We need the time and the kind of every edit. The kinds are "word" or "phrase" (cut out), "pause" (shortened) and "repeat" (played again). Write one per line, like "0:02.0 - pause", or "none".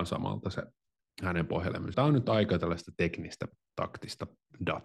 0:01.9 - word